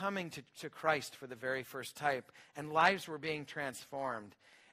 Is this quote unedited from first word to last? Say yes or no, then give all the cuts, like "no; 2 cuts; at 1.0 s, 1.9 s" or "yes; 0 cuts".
yes; 0 cuts